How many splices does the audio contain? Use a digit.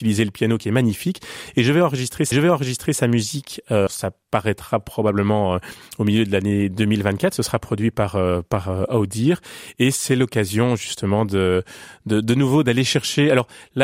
2